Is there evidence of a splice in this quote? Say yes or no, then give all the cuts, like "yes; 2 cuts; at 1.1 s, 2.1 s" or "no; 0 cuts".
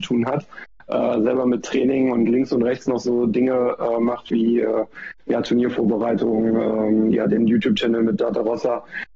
no; 0 cuts